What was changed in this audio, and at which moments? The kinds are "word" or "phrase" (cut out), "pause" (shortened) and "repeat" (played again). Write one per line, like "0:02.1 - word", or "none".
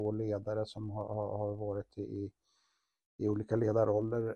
none